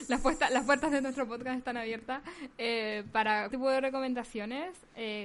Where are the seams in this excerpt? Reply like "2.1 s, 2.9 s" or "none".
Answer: 3.5 s